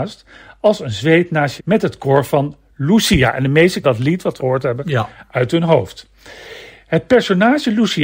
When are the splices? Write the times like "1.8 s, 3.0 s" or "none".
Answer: 1.6 s, 3.8 s, 4.4 s